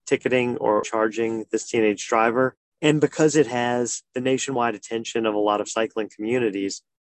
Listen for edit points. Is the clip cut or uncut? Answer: uncut